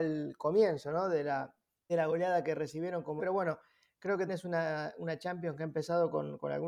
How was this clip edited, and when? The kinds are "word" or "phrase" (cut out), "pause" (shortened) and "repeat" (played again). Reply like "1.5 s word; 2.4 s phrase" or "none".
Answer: 1.9 s word; 3.2 s word; 4.3 s word

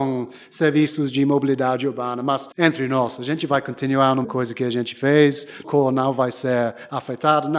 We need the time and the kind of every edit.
2.5 s pause; 4.2 s word; 5.6 s word

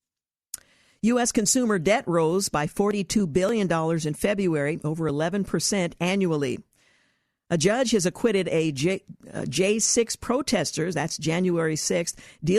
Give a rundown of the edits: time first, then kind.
none

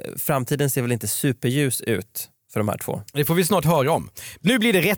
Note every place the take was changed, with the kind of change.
none

